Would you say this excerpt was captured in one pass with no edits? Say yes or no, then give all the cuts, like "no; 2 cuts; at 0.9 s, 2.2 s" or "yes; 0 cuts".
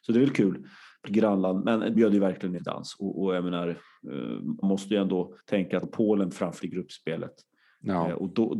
no; 7 cuts; at 1.0 s, 1.9 s, 2.6 s, 4.6 s, 5.4 s, 5.8 s, 6.6 s